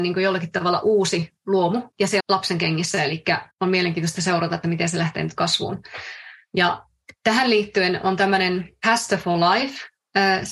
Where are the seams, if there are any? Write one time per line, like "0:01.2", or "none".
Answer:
0:02.2